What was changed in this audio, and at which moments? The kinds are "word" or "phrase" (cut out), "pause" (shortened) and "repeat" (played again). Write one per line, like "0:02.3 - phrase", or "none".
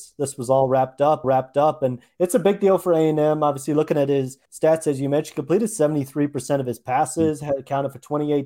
0:01.2 - repeat
0:04.4 - pause